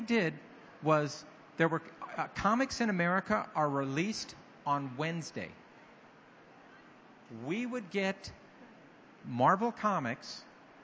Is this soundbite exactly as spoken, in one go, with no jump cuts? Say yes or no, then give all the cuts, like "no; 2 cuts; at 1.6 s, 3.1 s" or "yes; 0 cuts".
yes; 0 cuts